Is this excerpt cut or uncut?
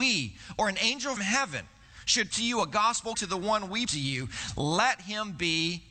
cut